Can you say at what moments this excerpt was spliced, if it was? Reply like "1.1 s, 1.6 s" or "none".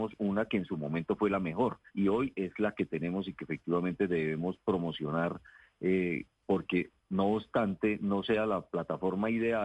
1.9 s, 6.3 s